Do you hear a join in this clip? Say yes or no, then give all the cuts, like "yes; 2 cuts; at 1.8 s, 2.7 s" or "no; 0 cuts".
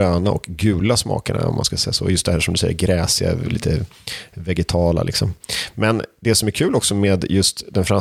no; 0 cuts